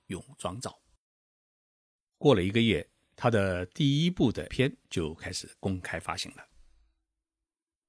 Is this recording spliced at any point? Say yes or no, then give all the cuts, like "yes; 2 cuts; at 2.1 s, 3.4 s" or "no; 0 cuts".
yes; 2 cuts; at 4.5 s, 4.8 s